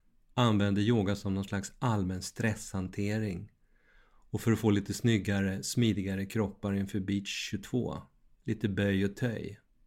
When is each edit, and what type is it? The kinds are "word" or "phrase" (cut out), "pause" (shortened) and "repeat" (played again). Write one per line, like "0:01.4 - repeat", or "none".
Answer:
none

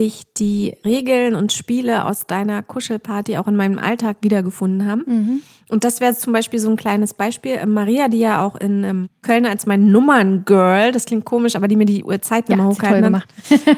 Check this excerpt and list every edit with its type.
none

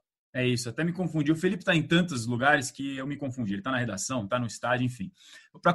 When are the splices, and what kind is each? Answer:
none

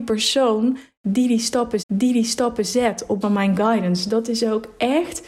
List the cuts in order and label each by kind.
0:01.8 - repeat
0:03.2 - word

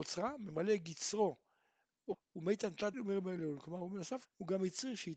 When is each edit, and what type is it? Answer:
0:02.1 - word
0:02.9 - word
0:04.2 - word

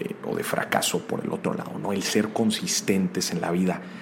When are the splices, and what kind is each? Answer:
none

